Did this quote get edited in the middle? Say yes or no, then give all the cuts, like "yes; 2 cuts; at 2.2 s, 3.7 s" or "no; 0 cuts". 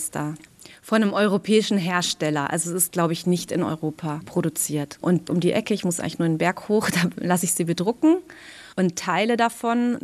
yes; 1 cut; at 8.7 s